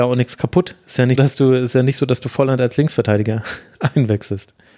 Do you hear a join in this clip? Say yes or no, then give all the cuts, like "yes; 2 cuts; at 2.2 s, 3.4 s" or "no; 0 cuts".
yes; 1 cut; at 1.2 s